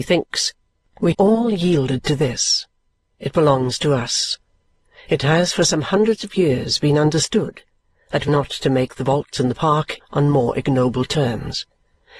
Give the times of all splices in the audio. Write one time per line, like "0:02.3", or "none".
0:01.1
0:08.3
0:10.0